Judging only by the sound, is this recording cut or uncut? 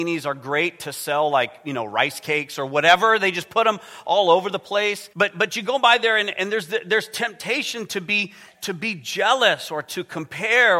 cut